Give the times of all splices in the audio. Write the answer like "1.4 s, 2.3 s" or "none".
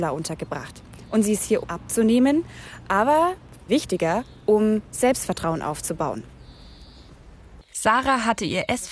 1.6 s, 3.7 s